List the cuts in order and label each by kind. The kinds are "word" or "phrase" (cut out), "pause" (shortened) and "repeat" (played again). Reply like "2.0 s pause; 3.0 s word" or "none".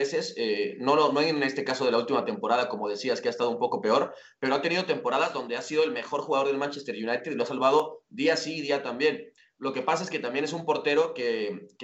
none